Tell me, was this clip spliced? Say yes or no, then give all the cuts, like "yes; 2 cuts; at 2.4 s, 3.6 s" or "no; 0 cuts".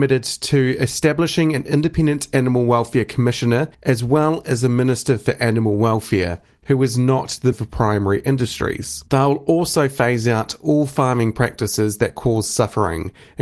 yes; 3 cuts; at 3.7 s, 7.5 s, 9.1 s